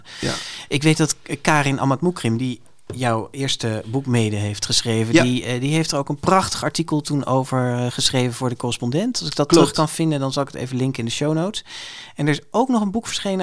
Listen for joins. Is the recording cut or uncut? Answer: uncut